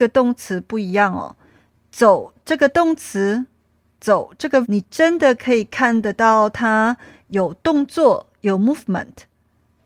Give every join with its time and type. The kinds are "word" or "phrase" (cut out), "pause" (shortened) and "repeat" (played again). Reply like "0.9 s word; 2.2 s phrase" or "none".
4.6 s word